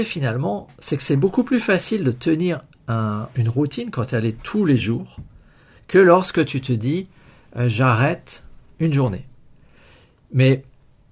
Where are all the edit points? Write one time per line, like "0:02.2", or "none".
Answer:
none